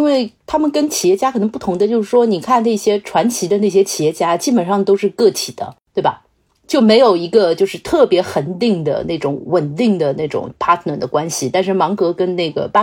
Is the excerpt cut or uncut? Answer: uncut